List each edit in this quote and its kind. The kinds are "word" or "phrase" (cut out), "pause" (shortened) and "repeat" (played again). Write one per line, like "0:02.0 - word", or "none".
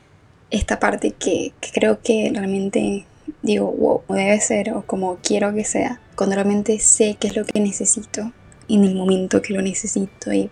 0:04.1 - phrase
0:06.1 - pause